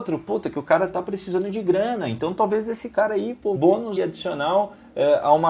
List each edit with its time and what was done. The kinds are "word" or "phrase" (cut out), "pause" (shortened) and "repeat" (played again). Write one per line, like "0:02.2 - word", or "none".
0:03.6 - word
0:04.0 - word